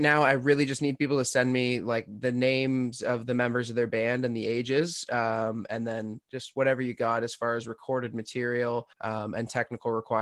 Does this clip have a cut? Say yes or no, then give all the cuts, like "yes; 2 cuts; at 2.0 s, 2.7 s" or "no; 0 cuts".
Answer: yes; 1 cut; at 8.9 s